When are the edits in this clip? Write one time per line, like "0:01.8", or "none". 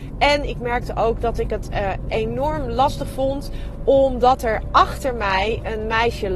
none